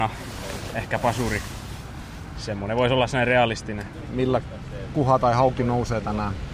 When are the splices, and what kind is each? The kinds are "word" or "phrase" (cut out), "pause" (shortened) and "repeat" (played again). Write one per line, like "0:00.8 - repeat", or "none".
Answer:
none